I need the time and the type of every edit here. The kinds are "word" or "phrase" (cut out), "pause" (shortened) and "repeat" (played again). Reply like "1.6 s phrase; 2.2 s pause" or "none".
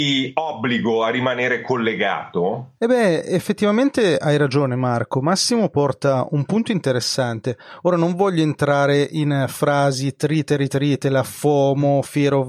2.8 s pause